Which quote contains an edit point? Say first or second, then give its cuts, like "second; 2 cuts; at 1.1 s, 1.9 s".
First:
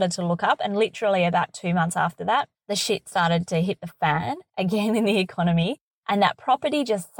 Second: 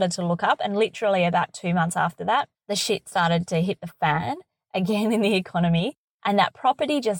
first; 1 cut; at 4.5 s